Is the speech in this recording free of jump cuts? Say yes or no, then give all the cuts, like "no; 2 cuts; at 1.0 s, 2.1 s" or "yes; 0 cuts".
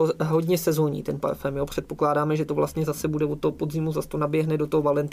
yes; 0 cuts